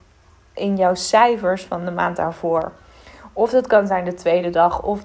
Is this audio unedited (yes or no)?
yes